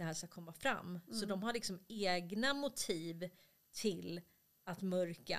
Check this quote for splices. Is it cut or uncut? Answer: uncut